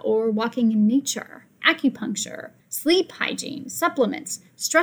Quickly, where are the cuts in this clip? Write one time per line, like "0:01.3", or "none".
0:01.6
0:02.6